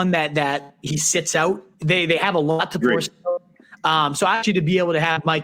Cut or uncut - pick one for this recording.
cut